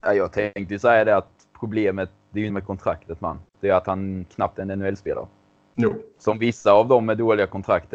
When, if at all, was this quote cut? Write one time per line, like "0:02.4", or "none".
0:02.5
0:03.5